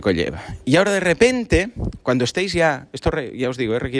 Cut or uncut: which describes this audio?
uncut